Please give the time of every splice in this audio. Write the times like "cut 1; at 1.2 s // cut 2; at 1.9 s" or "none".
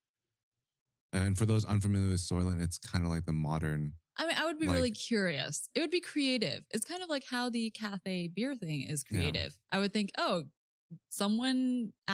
cut 1; at 9.6 s